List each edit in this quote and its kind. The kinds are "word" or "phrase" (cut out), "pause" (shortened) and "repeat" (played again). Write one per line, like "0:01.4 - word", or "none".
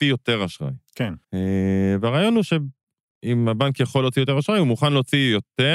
0:01.2 - pause